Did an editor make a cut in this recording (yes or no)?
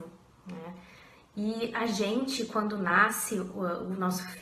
no